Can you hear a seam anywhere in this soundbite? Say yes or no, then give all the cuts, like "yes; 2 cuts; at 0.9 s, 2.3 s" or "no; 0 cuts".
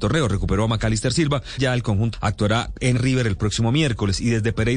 yes; 3 cuts; at 1.6 s, 2.1 s, 3.0 s